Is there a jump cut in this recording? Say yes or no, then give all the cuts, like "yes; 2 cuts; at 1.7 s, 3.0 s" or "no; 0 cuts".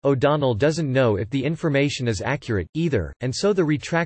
no; 0 cuts